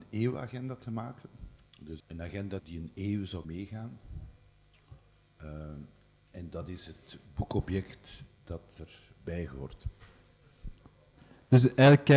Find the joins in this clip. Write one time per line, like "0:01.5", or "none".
0:02.0
0:02.6
0:03.4